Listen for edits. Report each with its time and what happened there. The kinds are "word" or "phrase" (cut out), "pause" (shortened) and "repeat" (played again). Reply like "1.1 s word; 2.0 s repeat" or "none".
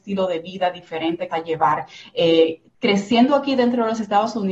1.3 s phrase; 2.7 s pause